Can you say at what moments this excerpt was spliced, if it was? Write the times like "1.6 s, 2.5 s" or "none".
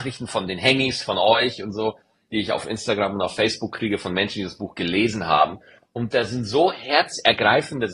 none